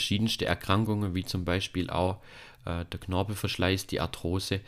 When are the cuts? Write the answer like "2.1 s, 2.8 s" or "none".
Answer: none